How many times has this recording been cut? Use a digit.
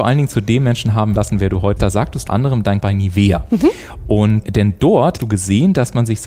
6